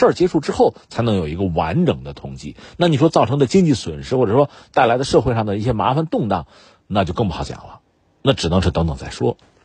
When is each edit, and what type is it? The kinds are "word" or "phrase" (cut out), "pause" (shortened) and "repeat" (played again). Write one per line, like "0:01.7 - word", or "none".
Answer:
none